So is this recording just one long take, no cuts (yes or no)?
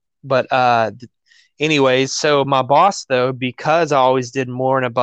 yes